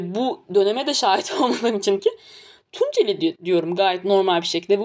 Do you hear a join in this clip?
yes; 1 cut; at 2.0 s

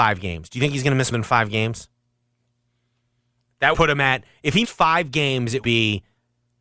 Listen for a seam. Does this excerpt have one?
yes; 4 cuts; at 1.1 s, 3.7 s, 4.6 s, 5.6 s

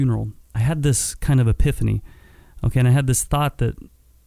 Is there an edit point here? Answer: no; 0 cuts

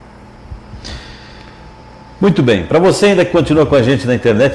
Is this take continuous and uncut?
yes; 0 cuts

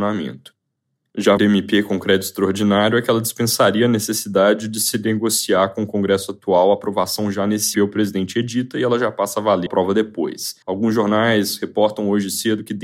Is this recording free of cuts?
no; 4 cuts; at 1.4 s, 7.7 s, 9.7 s, 10.6 s

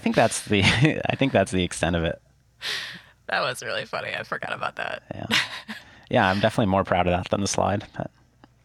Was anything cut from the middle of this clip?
no; 0 cuts

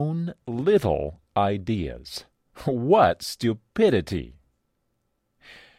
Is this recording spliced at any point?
yes; 1 cut; at 2.3 s

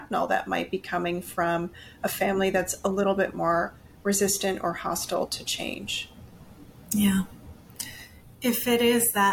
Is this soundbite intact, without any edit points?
yes; 0 cuts

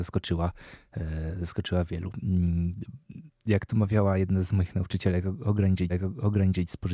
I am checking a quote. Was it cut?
yes; 1 cut; at 5.9 s

